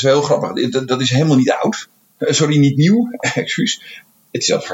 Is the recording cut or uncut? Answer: uncut